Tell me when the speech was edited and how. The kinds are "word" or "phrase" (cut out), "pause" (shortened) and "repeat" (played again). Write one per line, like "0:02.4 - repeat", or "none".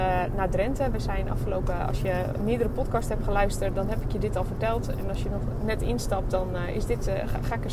0:03.7 - word

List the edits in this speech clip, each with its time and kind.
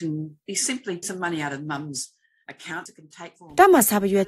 0:01.0 - word
0:03.4 - word

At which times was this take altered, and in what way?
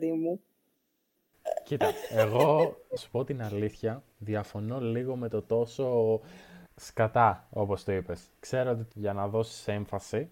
0:03.0 - word
0:06.7 - pause
0:08.9 - word

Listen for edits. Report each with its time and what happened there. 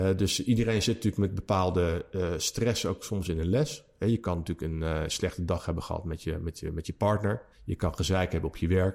0:07.5 - pause

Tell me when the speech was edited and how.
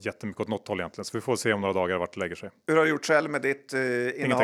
none

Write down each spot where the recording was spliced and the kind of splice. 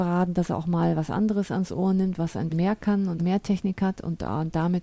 0:02.5 - word
0:03.2 - phrase

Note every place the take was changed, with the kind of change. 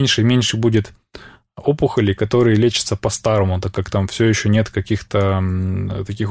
none

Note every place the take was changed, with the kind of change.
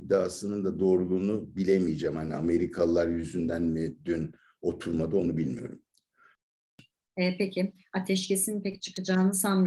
none

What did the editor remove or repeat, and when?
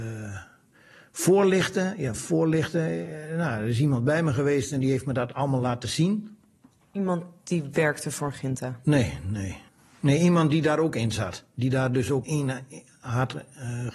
0:09.7 - pause
0:12.2 - word

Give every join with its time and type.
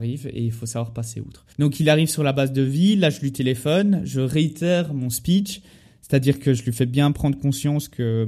0:01.5 - pause

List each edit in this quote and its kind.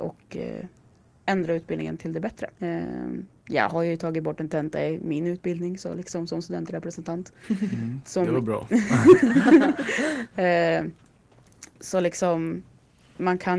0:02.5 - pause

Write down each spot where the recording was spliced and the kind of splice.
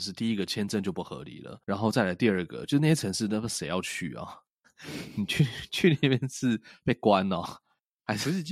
0:01.6 - pause

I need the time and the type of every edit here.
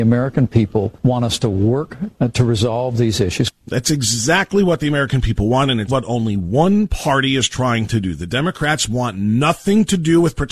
0:01.0 - pause
0:02.1 - word
0:03.6 - pause
0:05.9 - word

